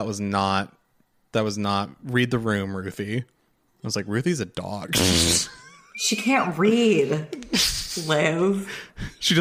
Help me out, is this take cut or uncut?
uncut